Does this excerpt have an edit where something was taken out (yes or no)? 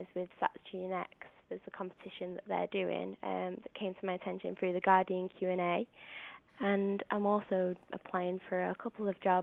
no